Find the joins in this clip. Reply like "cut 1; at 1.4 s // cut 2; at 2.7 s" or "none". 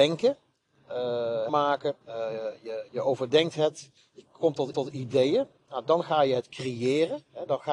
cut 1; at 1.5 s // cut 2; at 2.0 s // cut 3; at 2.9 s // cut 4; at 4.0 s // cut 5; at 4.7 s